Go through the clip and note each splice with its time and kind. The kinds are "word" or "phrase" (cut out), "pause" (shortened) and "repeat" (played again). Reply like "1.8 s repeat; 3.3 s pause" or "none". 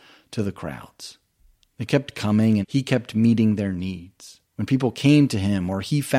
2.6 s word; 4.4 s pause